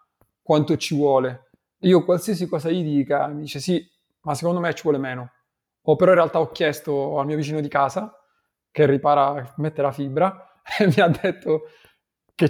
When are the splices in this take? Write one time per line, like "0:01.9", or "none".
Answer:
none